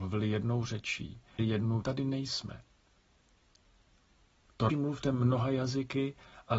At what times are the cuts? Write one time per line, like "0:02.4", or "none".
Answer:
0:01.4
0:01.8
0:04.7